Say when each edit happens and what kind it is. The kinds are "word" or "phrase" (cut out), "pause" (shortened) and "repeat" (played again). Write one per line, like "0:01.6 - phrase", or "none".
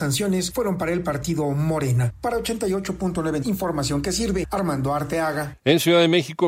0:03.4 - word

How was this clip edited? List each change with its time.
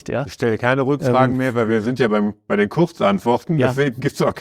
none

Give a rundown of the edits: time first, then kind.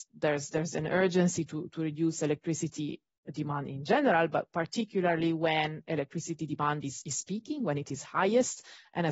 none

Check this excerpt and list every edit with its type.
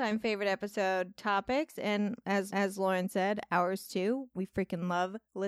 0:02.5 - repeat

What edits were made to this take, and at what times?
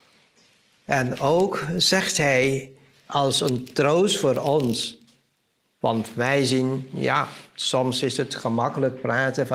none

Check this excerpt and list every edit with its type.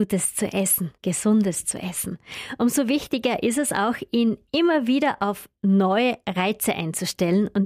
0:01.0 - pause

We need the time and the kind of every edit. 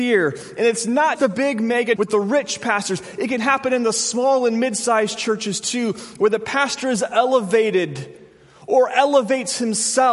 0:01.1 - word
0:02.0 - word

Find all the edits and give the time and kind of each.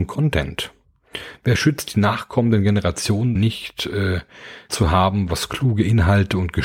0:03.4 - word
0:04.7 - word

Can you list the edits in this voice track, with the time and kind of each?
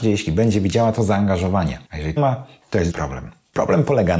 0:01.9 - pause
0:02.2 - phrase
0:02.9 - word

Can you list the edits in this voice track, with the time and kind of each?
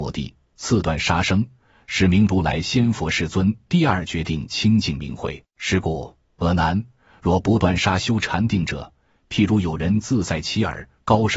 0:05.5 - pause

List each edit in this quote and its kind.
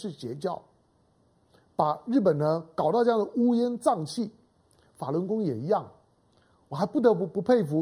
none

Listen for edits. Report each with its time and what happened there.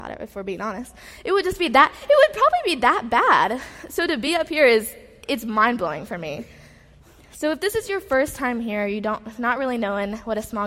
none

